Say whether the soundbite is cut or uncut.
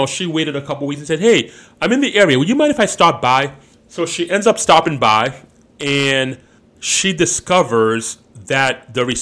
uncut